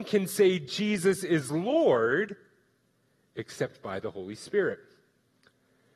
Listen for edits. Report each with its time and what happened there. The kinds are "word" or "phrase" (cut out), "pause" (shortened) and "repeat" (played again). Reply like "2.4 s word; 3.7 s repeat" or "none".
none